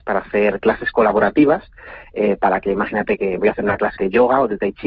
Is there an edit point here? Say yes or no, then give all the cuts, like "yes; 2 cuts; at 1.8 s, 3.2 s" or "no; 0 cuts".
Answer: yes; 1 cut; at 4.0 s